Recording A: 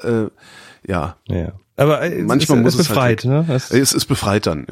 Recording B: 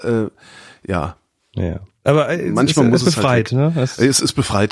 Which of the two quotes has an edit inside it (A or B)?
A